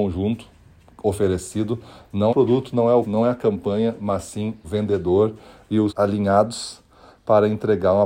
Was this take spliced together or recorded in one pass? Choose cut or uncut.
cut